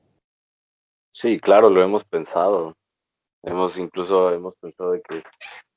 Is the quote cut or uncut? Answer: uncut